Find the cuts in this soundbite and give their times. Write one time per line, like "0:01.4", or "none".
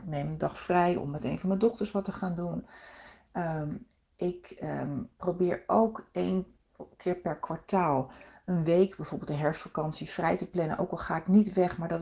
none